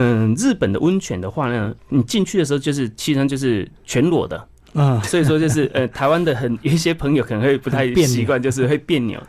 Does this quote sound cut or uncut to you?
cut